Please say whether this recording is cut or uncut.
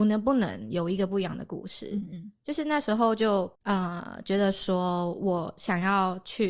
cut